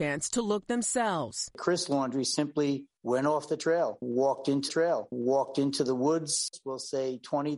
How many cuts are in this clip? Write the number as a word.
one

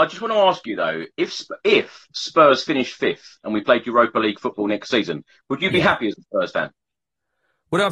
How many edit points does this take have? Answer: zero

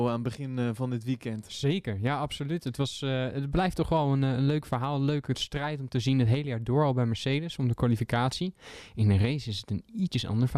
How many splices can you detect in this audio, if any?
zero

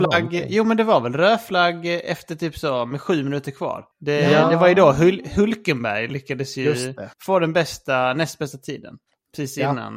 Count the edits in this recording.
two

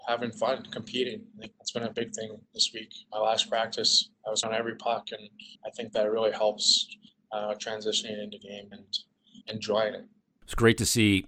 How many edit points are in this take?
six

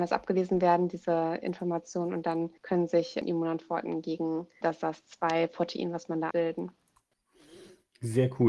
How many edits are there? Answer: two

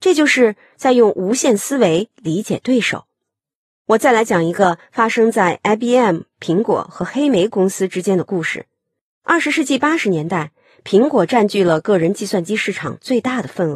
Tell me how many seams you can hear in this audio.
zero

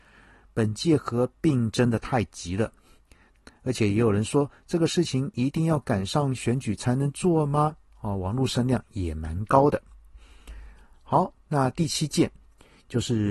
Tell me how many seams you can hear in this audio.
zero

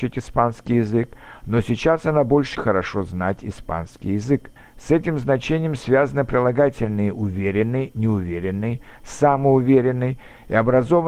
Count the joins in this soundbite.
two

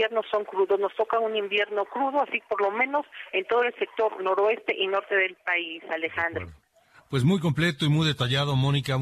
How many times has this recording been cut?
zero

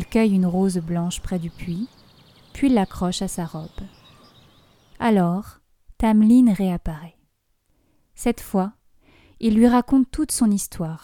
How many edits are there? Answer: zero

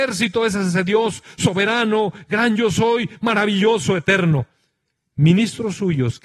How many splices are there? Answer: zero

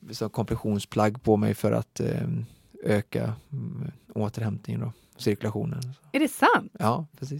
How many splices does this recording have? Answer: zero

